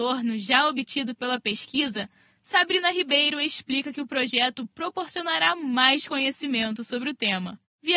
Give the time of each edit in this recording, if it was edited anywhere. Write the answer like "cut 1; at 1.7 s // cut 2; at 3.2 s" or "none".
none